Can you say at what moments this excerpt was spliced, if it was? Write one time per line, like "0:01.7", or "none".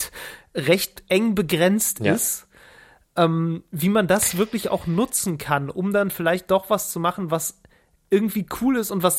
none